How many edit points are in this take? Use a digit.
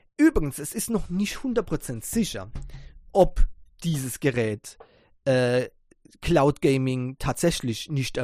0